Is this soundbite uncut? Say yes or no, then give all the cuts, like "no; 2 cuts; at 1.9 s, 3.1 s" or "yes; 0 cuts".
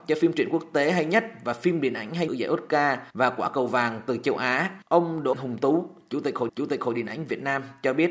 no; 5 cuts; at 2.3 s, 3.1 s, 4.8 s, 5.3 s, 6.5 s